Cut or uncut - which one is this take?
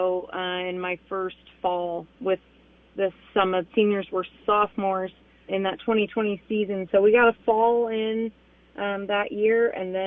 cut